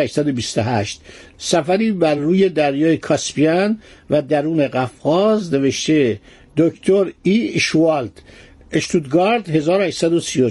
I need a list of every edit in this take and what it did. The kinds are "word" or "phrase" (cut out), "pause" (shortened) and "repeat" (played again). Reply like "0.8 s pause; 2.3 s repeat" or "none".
none